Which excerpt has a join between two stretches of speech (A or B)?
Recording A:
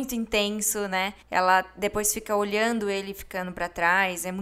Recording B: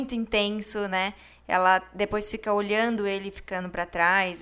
A